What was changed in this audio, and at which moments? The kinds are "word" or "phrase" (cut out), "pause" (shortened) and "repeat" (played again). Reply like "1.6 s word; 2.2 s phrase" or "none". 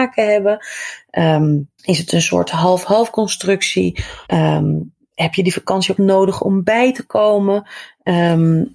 1.8 s pause; 4.3 s pause; 6.0 s word